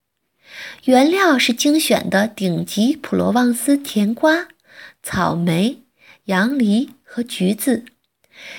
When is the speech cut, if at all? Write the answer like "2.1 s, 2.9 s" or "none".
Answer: none

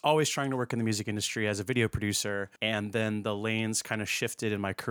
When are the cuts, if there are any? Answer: 2.6 s

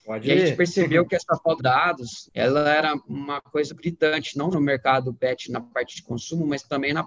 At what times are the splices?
1.6 s, 2.3 s, 3.7 s, 4.5 s

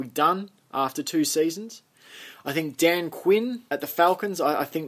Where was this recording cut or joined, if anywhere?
3.7 s

